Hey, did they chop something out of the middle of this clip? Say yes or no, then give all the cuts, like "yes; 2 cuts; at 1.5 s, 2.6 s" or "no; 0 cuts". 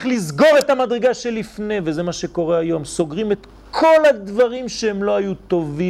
no; 0 cuts